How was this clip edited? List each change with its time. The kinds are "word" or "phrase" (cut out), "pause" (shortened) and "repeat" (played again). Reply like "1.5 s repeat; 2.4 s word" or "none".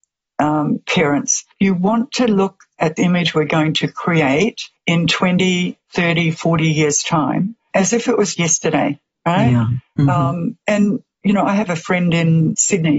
1.5 s pause; 3.0 s word; 4.8 s pause; 7.7 s word; 8.4 s word

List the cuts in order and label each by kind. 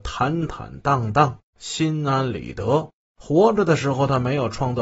3.0 s pause

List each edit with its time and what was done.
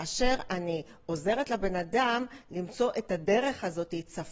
none

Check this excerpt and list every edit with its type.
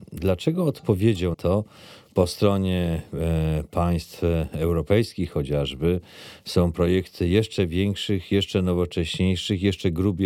1.3 s word

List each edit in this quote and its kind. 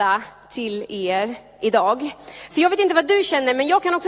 none

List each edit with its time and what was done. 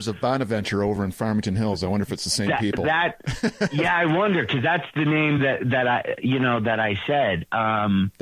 none

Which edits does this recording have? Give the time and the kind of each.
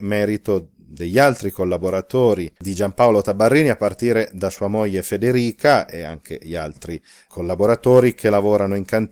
none

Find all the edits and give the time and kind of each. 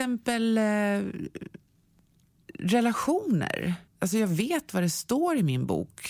3.9 s pause

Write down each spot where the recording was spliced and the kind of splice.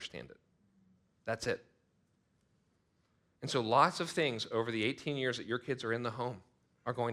none

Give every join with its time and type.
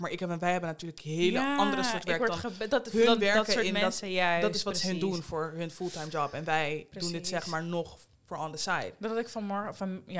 none

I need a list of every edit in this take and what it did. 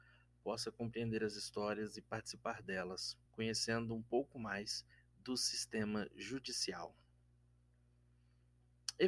3.3 s pause; 4.9 s pause

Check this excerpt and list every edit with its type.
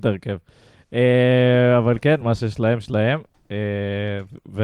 none

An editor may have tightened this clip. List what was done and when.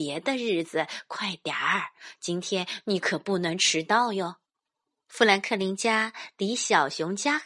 4.5 s pause

